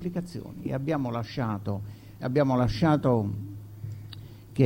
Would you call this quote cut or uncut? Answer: cut